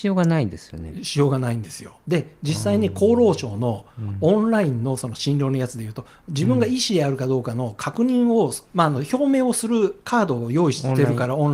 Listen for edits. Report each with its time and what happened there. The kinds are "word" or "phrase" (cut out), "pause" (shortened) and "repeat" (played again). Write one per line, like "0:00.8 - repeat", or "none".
0:02.0 - pause
0:08.6 - pause